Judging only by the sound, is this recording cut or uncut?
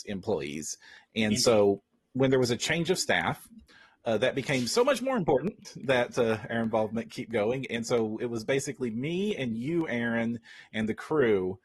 uncut